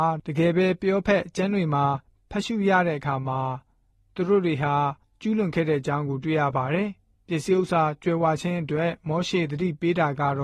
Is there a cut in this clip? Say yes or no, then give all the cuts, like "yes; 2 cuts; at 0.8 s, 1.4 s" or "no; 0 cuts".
no; 0 cuts